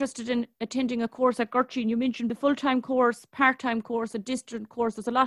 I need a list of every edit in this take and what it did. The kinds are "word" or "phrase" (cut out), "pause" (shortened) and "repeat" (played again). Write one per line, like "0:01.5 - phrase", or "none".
0:02.3 - word